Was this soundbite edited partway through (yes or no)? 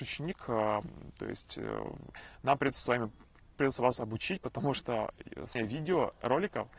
yes